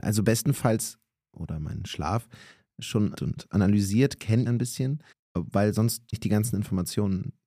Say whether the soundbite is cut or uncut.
cut